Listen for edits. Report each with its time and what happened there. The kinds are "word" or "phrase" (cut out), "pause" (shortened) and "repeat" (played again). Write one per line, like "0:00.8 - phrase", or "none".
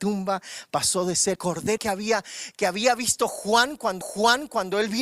0:01.4 - word
0:01.8 - word
0:04.0 - repeat